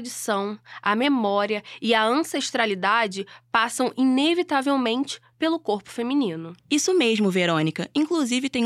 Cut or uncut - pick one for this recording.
cut